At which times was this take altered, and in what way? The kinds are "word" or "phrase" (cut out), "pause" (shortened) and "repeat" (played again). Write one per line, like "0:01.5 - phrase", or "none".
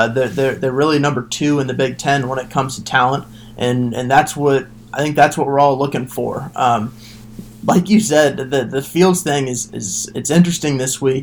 none